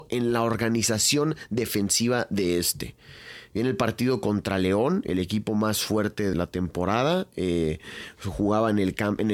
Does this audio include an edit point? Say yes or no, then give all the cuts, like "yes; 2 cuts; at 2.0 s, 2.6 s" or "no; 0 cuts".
yes; 1 cut; at 6.3 s